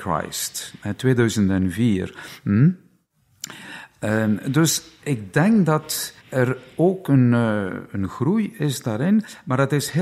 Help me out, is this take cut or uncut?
cut